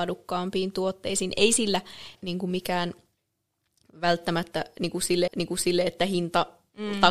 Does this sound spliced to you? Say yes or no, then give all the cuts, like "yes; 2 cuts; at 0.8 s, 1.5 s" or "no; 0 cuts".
yes; 2 cuts; at 2.2 s, 5.3 s